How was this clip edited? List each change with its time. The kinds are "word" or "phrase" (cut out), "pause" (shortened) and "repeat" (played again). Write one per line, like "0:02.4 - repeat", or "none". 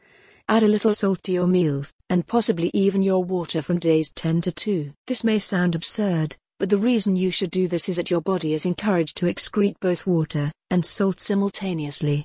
0:00.9 - word
0:05.0 - pause
0:07.9 - word